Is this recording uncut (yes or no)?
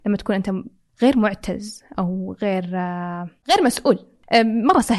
yes